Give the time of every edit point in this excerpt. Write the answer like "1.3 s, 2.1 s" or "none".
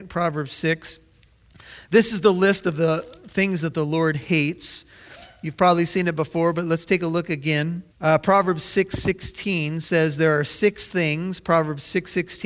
7.9 s